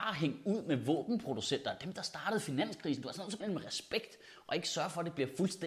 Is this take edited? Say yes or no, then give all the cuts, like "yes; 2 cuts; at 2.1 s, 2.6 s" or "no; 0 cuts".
yes; 1 cut; at 3.4 s